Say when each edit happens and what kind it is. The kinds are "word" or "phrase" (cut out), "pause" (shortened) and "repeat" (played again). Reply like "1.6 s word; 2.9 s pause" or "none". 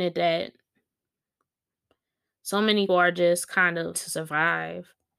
2.9 s word; 3.9 s word